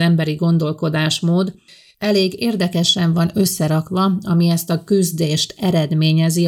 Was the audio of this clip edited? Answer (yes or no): no